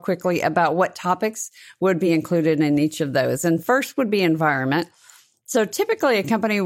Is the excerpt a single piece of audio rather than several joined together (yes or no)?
yes